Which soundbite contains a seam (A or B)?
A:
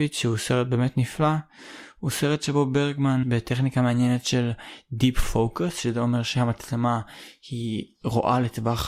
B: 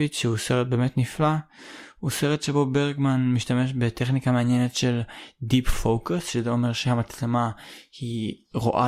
A